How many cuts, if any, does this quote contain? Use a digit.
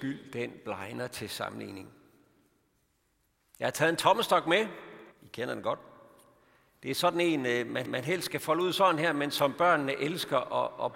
2